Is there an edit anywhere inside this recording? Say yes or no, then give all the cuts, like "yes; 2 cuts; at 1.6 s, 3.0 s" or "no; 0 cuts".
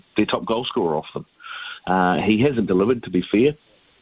yes; 1 cut; at 2.7 s